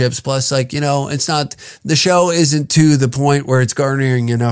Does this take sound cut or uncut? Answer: uncut